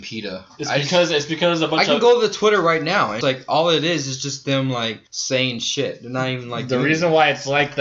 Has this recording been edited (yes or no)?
yes